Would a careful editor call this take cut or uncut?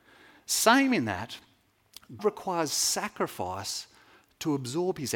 cut